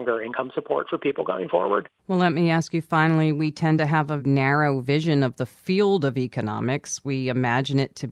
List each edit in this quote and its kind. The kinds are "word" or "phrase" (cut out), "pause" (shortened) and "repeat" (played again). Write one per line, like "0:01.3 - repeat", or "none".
0:02.0 - pause
0:04.2 - word